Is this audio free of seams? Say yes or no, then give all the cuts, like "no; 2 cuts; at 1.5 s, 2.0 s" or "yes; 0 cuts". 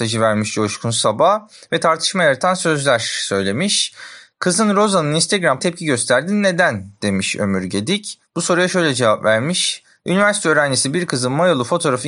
no; 1 cut; at 5.6 s